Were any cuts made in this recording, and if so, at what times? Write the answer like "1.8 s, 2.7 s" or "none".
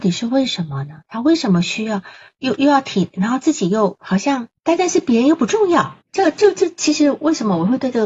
4.6 s, 6.0 s

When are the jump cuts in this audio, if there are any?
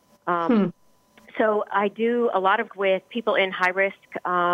2.7 s

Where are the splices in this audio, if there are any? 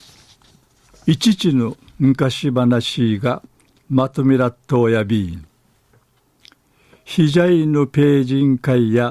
none

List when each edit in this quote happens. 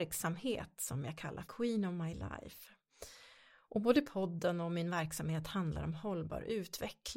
1.4 s

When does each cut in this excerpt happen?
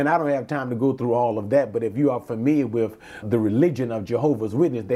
3.2 s

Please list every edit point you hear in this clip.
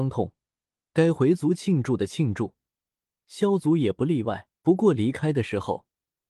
4.5 s

